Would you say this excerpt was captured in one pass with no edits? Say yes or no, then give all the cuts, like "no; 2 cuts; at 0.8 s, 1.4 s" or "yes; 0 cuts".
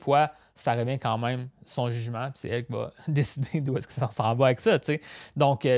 yes; 0 cuts